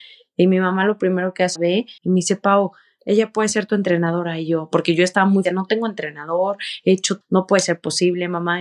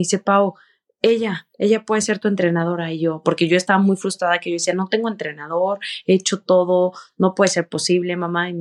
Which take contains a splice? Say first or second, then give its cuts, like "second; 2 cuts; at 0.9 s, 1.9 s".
first; 5 cuts; at 1.6 s, 2.0 s, 3.0 s, 5.4 s, 7.2 s